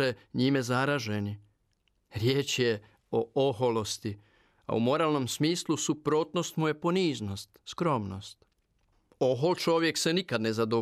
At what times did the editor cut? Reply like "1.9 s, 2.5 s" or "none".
none